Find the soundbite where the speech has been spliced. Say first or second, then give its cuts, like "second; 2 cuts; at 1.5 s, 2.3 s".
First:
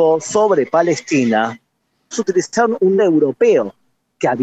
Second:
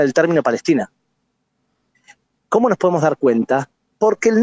first; 2 cuts; at 2.1 s, 3.0 s